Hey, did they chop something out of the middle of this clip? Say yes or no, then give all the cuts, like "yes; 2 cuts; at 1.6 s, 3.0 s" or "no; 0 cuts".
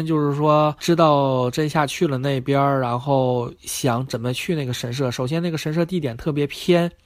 yes; 1 cut; at 3.6 s